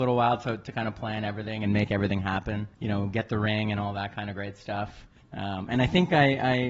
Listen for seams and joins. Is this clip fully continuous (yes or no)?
no